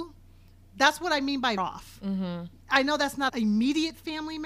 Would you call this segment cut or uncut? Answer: cut